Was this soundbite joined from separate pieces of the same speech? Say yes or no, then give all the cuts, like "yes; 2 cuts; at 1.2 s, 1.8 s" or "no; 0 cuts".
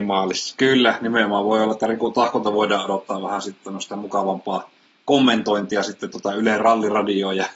no; 0 cuts